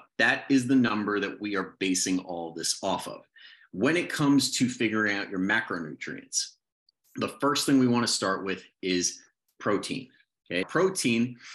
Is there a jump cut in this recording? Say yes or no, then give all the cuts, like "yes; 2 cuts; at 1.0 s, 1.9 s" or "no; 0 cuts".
yes; 1 cut; at 10.6 s